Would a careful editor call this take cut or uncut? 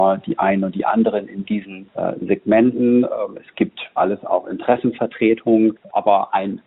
cut